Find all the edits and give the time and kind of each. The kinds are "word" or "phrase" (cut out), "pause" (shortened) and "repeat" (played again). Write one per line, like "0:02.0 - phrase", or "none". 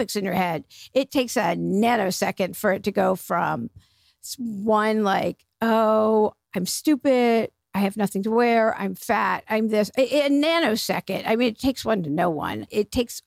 0:01.1 - word